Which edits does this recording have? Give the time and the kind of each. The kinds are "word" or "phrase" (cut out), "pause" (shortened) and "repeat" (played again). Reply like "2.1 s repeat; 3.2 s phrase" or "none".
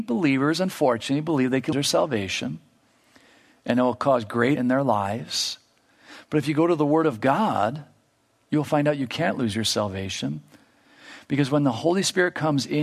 1.7 s word; 4.6 s word